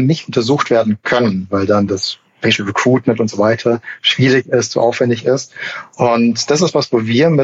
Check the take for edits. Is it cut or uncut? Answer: uncut